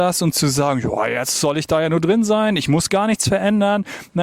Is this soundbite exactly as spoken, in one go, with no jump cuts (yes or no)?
yes